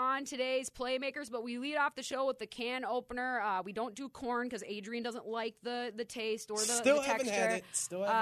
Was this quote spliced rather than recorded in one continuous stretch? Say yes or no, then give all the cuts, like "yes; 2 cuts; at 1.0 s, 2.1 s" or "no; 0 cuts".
no; 0 cuts